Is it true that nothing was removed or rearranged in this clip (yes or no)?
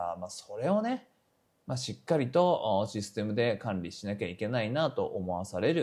yes